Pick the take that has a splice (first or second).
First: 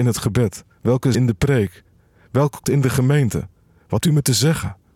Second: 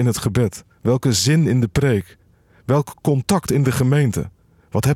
first